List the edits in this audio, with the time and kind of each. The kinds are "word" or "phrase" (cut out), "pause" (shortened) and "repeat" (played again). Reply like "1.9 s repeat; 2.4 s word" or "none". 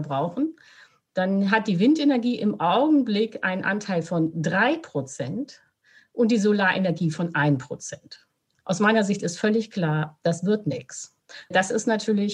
none